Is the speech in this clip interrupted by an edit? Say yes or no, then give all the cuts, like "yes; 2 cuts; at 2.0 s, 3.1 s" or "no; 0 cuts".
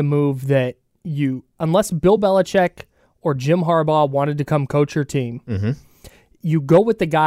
no; 0 cuts